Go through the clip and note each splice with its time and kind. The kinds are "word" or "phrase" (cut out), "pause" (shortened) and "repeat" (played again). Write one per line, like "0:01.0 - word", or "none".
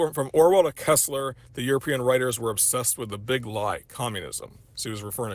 none